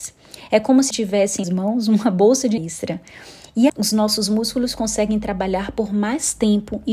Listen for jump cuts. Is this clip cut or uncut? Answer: cut